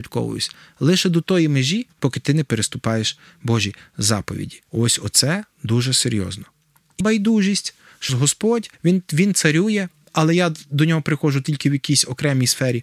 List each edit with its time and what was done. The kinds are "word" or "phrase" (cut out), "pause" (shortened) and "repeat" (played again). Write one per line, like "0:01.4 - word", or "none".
0:01.9 - pause
0:04.7 - pause
0:07.0 - word
0:08.1 - phrase
0:08.7 - pause